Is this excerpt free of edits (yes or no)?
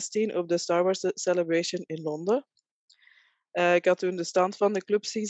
yes